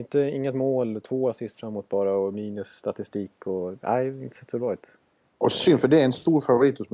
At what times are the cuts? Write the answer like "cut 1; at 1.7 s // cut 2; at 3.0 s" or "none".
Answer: none